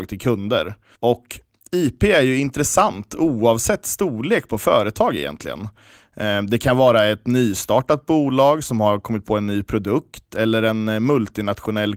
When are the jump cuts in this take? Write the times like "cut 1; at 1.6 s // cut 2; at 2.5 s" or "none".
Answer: cut 1; at 0.9 s